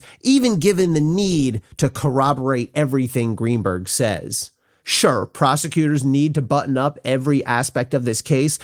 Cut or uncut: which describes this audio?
uncut